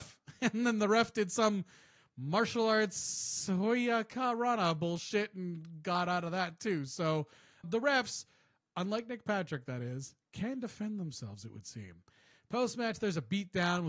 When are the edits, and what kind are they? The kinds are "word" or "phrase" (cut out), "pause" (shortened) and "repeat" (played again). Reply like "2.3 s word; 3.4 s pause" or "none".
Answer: 7.6 s word